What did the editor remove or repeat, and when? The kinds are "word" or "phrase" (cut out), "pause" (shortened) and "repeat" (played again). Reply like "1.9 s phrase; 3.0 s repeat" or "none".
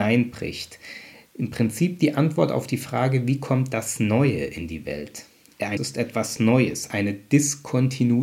5.8 s word